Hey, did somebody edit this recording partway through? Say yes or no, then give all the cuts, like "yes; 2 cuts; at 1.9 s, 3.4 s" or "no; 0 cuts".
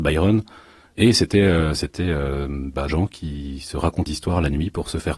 yes; 2 cuts; at 2.9 s, 4.1 s